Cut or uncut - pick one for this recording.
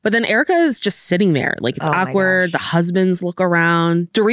uncut